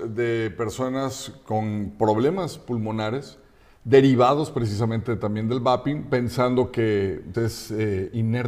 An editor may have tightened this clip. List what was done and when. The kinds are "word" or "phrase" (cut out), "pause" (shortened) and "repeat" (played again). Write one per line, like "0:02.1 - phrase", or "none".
0:07.3 - word

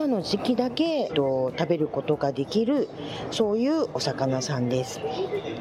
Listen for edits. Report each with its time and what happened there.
0:01.1 - phrase

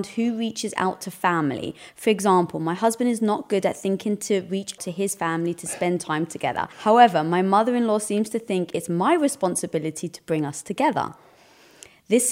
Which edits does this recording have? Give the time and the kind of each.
0:04.8 - word
0:06.7 - pause

